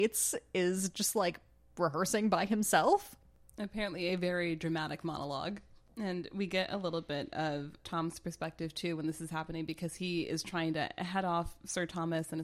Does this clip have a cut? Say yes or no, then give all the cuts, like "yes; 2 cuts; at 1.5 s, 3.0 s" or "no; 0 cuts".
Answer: no; 0 cuts